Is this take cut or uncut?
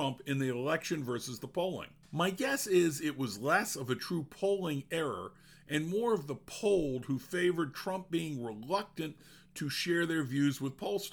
cut